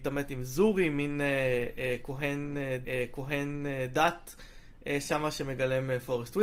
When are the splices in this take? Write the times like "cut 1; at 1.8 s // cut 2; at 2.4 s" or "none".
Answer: cut 1; at 2.8 s

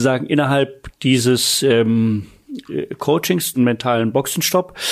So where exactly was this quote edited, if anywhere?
cut 1; at 3.5 s

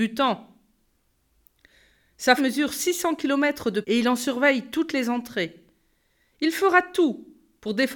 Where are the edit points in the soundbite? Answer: cut 1; at 2.4 s // cut 2; at 3.8 s

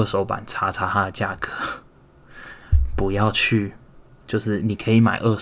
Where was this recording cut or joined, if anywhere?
cut 1; at 4.2 s

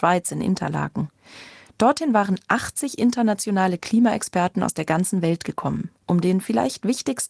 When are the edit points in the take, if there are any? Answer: none

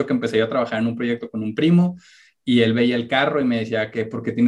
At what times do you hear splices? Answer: none

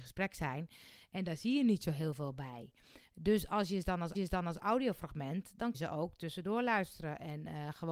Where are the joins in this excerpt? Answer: cut 1; at 4.1 s // cut 2; at 5.7 s

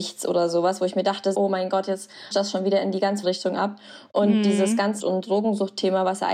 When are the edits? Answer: cut 1; at 1.3 s // cut 2; at 2.3 s // cut 3; at 3.2 s // cut 4; at 5.0 s

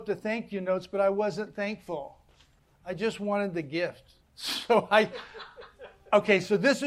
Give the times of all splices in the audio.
cut 1; at 2.6 s // cut 2; at 4.2 s

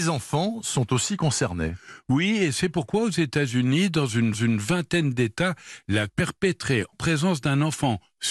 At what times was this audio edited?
cut 1; at 4.3 s // cut 2; at 6.1 s // cut 3; at 6.9 s

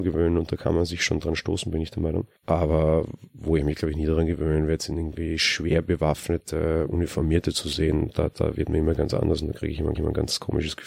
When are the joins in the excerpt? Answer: cut 1; at 2.4 s // cut 2; at 9.9 s

